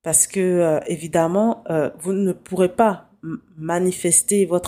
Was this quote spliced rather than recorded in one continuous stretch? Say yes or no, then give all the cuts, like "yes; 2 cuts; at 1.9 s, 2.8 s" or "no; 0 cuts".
no; 0 cuts